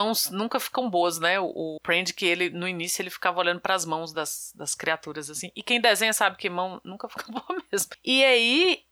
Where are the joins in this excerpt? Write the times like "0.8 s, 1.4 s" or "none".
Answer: none